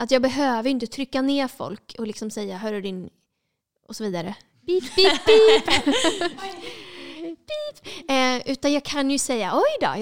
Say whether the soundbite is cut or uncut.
uncut